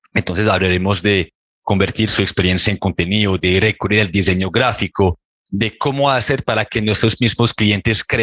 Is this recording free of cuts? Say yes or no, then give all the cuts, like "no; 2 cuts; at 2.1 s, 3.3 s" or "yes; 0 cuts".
yes; 0 cuts